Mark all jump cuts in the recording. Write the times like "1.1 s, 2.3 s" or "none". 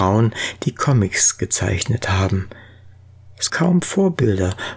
3.5 s